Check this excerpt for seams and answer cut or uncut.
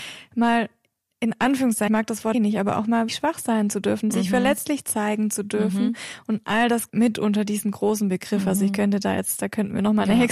cut